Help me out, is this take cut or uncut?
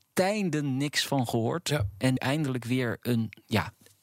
cut